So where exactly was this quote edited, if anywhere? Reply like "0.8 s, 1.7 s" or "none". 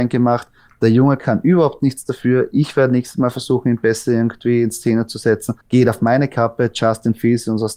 5.6 s